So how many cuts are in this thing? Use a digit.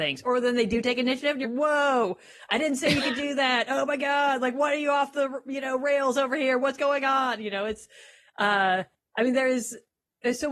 1